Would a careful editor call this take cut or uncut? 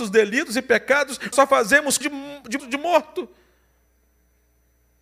cut